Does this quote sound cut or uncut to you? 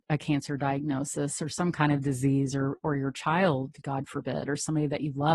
uncut